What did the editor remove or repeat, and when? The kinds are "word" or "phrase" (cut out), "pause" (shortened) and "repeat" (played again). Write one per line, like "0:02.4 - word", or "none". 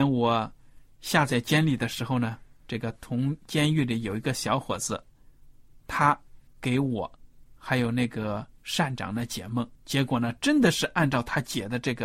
0:06.5 - pause
0:09.7 - pause